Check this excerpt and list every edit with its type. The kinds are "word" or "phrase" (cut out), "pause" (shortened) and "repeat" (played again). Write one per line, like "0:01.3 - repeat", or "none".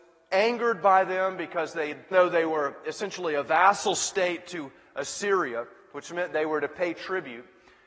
0:02.1 - word